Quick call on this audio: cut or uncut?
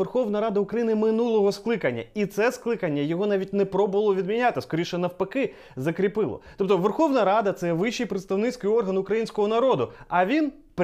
uncut